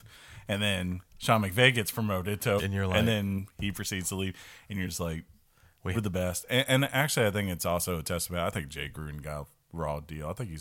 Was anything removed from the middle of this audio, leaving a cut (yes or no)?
yes